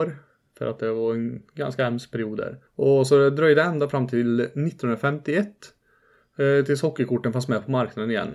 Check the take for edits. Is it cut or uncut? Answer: cut